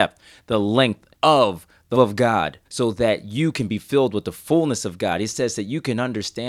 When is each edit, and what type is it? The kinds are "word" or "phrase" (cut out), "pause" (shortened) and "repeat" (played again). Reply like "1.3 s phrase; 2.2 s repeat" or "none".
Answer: 1.1 s pause; 1.9 s word; 2.6 s pause